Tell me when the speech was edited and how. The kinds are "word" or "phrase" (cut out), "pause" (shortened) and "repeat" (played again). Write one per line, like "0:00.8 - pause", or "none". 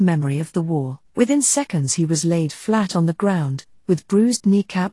0:01.0 - pause